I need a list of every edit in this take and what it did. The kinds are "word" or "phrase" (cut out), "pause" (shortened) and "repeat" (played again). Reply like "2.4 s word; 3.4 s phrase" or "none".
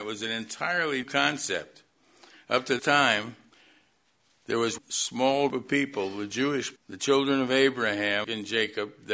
1.0 s word; 2.8 s word; 4.8 s word; 5.5 s word; 6.8 s word; 8.2 s word